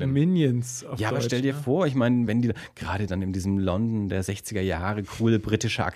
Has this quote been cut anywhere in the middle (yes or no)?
no